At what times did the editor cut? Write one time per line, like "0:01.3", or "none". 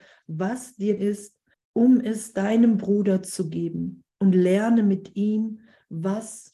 0:01.0
0:01.5
0:04.1